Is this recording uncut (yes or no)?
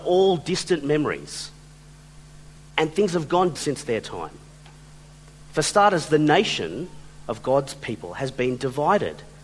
no